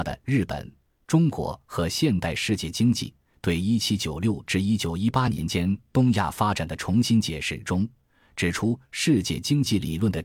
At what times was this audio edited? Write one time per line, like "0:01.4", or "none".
none